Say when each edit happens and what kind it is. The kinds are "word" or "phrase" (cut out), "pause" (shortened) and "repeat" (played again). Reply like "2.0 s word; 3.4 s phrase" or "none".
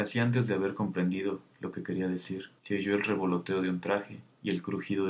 2.6 s pause